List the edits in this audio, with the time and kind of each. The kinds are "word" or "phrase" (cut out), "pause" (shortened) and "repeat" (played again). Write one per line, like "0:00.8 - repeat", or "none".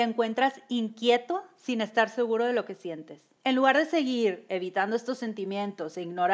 none